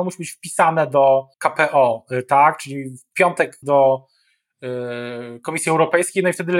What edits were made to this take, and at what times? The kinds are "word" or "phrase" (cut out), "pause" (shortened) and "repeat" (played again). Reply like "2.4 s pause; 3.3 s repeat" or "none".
1.3 s pause; 3.1 s word; 3.6 s phrase

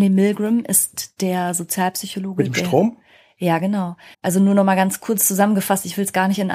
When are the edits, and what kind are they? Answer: 4.1 s pause

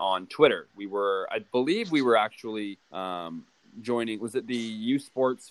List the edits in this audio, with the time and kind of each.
2.8 s pause

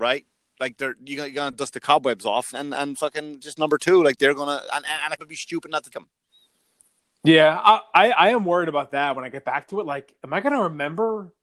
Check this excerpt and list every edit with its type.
2.5 s word; 5.2 s word; 5.9 s word

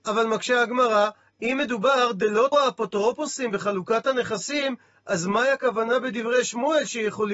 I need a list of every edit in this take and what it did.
2.5 s word

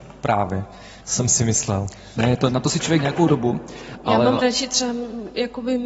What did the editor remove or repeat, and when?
1.0 s pause; 3.0 s word; 4.4 s word

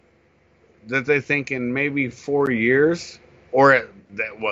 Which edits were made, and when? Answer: none

